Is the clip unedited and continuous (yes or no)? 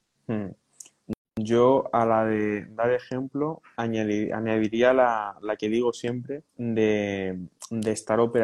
no